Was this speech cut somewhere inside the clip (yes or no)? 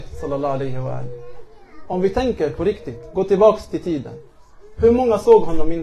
no